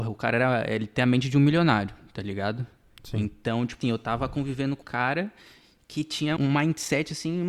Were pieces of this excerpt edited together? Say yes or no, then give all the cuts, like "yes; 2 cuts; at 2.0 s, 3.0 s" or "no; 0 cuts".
yes; 3 cuts; at 3.8 s, 4.8 s, 6.4 s